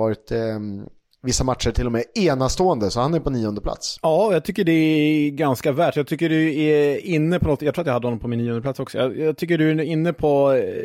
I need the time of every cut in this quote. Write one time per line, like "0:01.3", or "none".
none